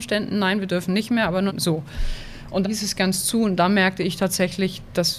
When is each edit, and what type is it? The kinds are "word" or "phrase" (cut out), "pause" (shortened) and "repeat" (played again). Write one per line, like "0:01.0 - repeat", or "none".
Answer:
0:01.5 - word
0:02.6 - word

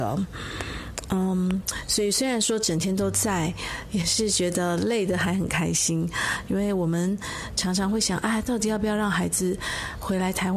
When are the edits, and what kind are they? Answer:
none

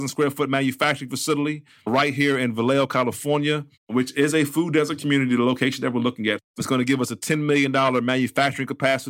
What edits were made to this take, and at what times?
0:03.7 - pause

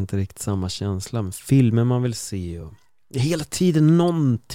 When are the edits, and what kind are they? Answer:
none

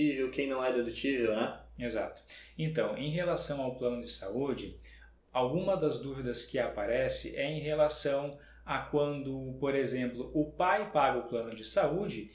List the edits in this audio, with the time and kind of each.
none

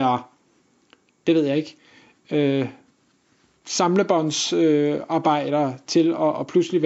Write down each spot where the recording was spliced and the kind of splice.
none

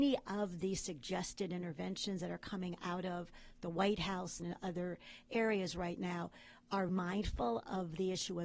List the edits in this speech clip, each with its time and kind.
0:04.4 - phrase
0:06.9 - word

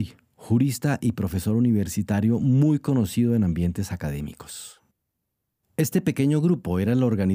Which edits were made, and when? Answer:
none

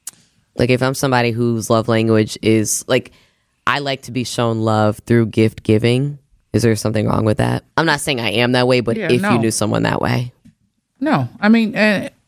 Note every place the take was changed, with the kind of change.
0:07.7 - pause

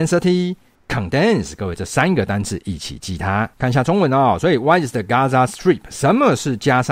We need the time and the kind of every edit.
0:03.5 - pause

